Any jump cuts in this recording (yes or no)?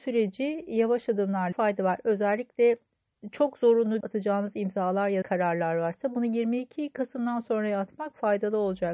yes